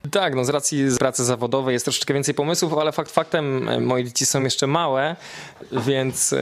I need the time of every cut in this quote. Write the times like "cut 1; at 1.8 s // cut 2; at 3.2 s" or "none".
none